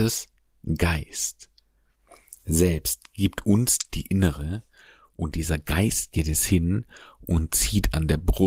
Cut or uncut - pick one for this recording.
uncut